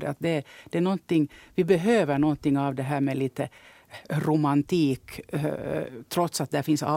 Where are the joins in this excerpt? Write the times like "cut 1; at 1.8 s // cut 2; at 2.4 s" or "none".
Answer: none